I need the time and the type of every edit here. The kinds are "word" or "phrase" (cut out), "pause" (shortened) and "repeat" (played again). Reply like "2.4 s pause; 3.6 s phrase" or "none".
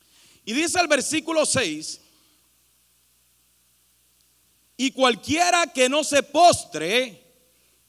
none